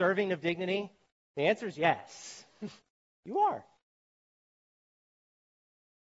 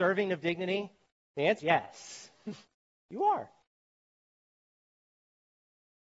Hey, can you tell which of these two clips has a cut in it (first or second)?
second